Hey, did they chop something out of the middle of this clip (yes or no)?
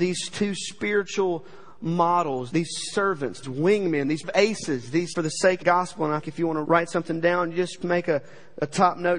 yes